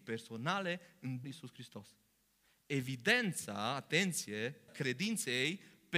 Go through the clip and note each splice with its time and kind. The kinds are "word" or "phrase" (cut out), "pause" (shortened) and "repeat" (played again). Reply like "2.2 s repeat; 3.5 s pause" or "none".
1.2 s word; 4.7 s word